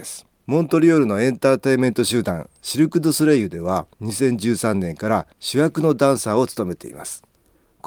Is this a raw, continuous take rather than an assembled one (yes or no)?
no